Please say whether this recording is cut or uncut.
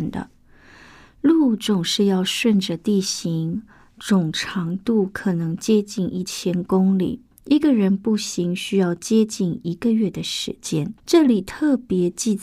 cut